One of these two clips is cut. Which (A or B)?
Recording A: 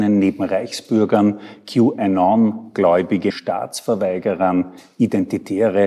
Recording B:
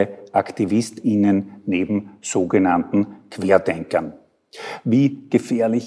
A